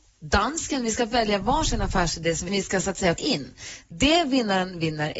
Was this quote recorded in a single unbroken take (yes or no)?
no